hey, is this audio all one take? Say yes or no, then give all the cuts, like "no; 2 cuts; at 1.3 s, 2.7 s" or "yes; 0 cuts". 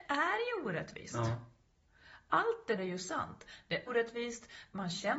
no; 2 cuts; at 2.8 s, 3.9 s